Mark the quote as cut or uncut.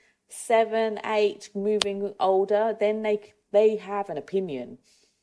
uncut